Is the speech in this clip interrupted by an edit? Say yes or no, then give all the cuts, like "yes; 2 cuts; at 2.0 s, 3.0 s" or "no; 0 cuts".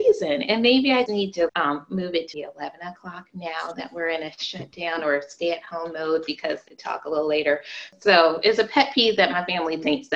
yes; 4 cuts; at 1.1 s, 1.5 s, 2.3 s, 6.7 s